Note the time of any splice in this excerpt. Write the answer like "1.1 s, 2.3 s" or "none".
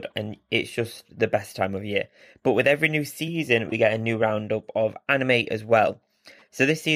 none